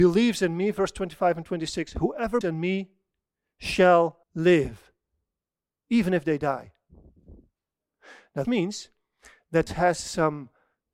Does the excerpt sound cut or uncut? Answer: cut